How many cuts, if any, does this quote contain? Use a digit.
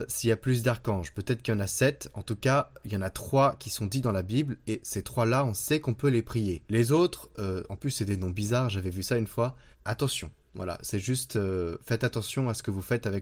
2